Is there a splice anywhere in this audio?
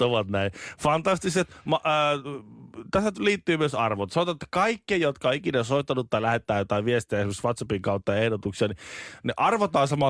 no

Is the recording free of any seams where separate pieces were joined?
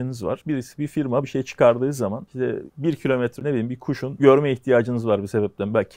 no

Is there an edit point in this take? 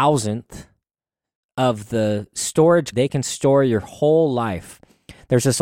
yes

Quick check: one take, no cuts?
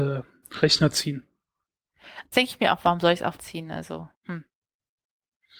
no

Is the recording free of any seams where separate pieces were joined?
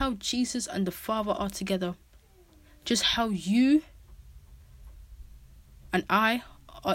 yes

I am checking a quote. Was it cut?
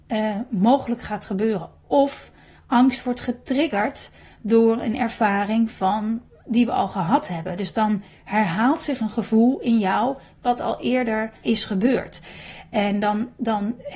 yes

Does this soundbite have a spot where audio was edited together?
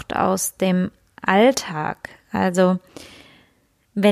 no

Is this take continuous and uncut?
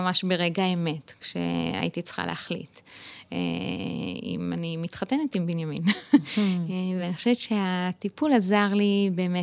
yes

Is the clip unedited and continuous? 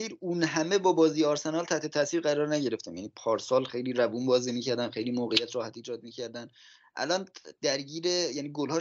yes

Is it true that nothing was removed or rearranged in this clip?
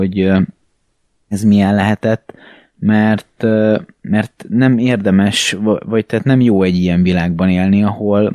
yes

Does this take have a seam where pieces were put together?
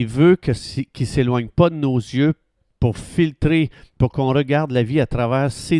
no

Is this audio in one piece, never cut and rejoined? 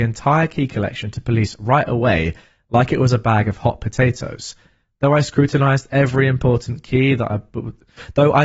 yes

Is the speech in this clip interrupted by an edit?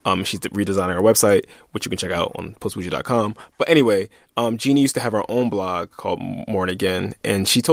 no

